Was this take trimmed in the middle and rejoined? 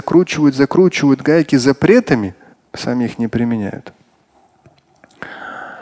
yes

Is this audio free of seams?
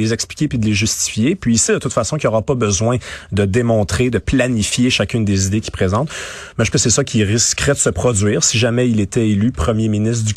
no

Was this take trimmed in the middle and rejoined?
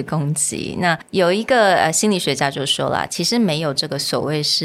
no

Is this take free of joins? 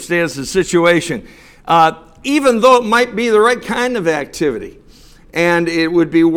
yes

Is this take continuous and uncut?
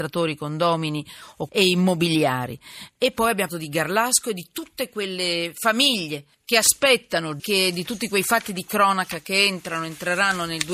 no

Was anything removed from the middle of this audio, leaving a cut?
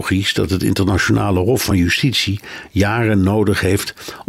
no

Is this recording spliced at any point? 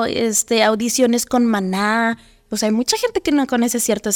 no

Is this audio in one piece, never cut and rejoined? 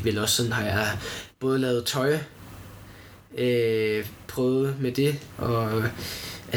yes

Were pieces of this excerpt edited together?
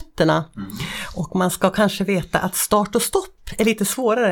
no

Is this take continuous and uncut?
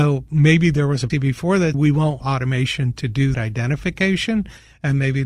no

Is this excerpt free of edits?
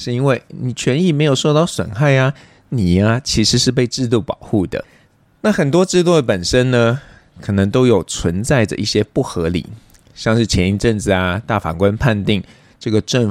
yes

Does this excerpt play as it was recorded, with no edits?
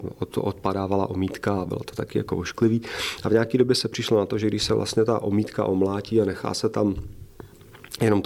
yes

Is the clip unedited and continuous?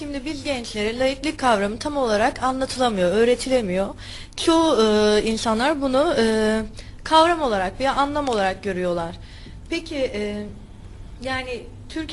yes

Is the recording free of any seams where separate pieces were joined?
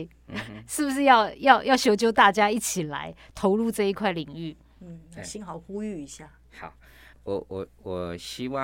no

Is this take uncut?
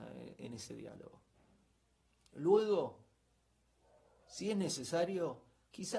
yes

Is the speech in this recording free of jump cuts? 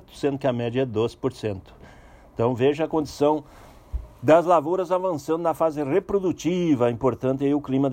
yes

